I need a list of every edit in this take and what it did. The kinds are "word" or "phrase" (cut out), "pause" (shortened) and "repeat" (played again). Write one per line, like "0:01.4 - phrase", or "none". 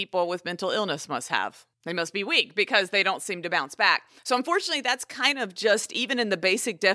0:01.7 - pause
0:04.2 - pause